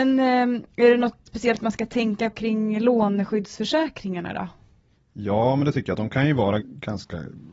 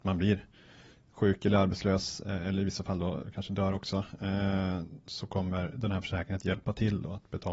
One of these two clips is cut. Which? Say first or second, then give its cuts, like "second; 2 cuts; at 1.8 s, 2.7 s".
first; 3 cuts; at 1.3 s, 2.3 s, 6.6 s